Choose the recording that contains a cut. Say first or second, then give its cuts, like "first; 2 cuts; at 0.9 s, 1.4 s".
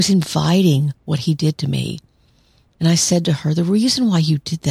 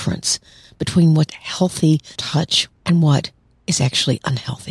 second; 3 cuts; at 1.3 s, 2.2 s, 2.7 s